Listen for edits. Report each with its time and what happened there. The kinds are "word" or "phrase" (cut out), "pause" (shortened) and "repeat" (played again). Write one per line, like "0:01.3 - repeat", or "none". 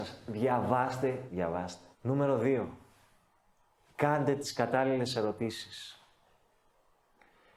0:01.3 - phrase
0:01.9 - pause